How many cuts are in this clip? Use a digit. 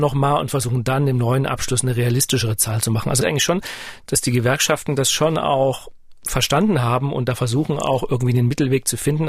1